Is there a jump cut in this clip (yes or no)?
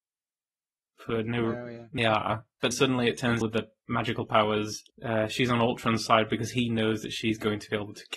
yes